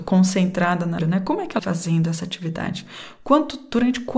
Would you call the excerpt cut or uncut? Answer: cut